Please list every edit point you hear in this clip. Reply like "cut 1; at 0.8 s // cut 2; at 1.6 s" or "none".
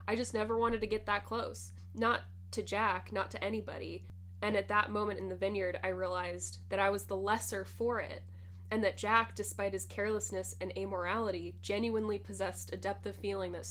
none